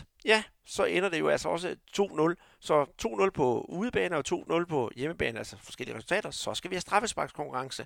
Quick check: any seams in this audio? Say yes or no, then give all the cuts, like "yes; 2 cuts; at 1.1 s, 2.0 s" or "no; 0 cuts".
no; 0 cuts